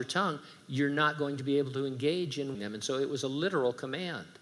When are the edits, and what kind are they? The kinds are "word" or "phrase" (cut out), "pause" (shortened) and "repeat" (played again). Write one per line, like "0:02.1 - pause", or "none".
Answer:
0:02.5 - word